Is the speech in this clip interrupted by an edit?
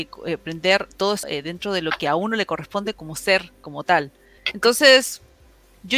yes; 4 cuts; at 0.9 s, 1.2 s, 2.9 s, 4.4 s

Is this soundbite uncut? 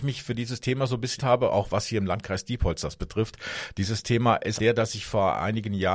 no; 2 cuts; at 1.2 s, 4.6 s

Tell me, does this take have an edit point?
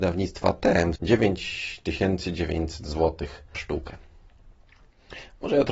yes; 2 cuts; at 1.0 s, 3.5 s

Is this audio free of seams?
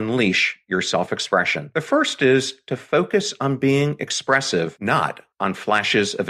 yes; 0 cuts

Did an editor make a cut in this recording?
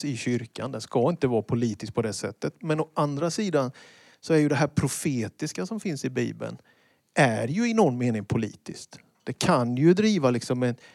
no; 0 cuts

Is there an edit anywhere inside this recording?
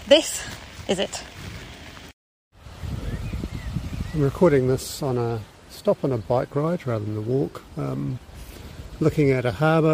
no; 0 cuts

